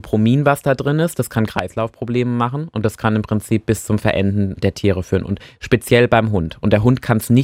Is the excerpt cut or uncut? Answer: uncut